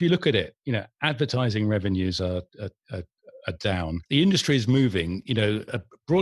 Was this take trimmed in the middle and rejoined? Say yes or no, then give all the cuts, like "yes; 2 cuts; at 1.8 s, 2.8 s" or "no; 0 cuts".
yes; 1 cut; at 4.1 s